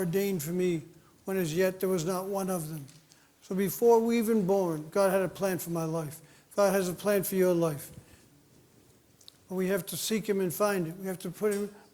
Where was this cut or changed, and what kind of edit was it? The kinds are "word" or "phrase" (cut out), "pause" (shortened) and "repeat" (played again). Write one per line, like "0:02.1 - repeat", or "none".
none

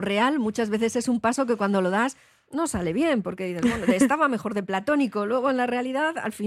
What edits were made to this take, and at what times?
none

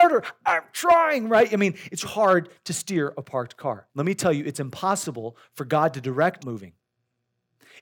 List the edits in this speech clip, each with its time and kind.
0:02.0 - word
0:03.9 - pause
0:06.4 - phrase

